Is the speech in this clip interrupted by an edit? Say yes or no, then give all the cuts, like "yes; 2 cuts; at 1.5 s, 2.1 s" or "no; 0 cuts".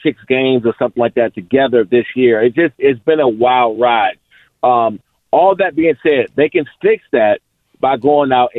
no; 0 cuts